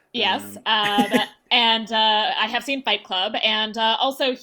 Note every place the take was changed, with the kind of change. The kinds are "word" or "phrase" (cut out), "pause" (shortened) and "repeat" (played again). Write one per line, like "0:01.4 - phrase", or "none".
none